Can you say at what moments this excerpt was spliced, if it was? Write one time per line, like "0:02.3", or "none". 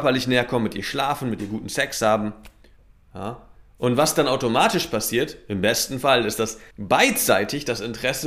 0:02.8
0:06.7